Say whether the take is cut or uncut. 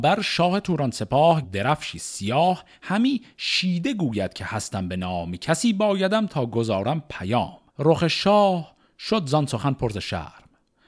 cut